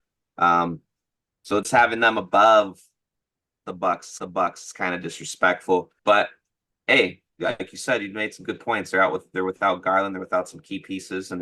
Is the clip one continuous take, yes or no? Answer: no